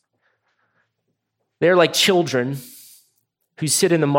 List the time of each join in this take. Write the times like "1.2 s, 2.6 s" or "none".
none